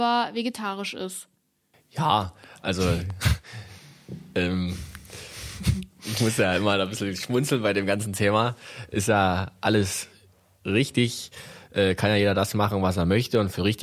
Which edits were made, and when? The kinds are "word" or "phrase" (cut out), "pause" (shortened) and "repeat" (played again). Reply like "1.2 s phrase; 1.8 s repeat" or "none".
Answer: none

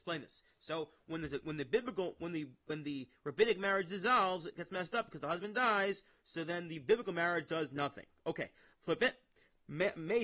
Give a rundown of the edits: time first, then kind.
none

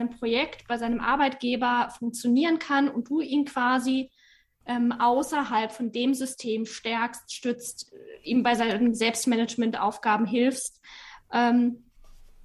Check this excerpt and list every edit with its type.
none

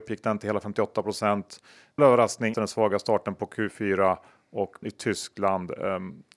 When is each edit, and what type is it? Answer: 2.0 s phrase; 2.5 s word; 4.8 s word

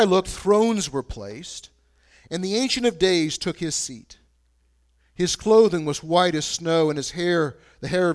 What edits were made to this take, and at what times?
none

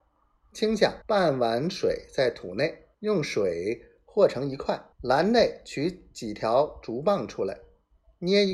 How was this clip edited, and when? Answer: 1.0 s pause; 2.9 s pause; 4.9 s pause

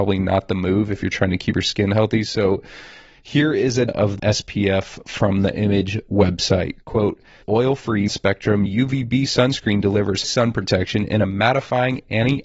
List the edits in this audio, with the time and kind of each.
3.9 s word; 4.2 s word; 7.4 s word; 8.1 s word; 8.7 s word; 10.2 s word

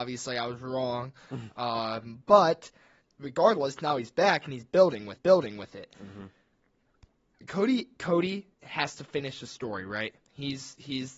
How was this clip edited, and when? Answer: 3.0 s pause; 5.2 s repeat; 8.5 s pause; 10.2 s pause

